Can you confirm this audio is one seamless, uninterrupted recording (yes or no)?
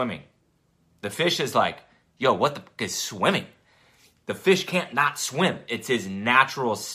yes